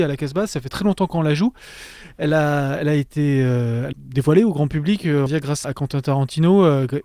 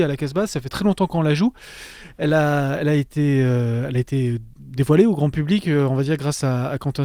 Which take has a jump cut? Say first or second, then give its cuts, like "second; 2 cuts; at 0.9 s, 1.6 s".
first; 3 cuts; at 3.9 s, 5.3 s, 5.6 s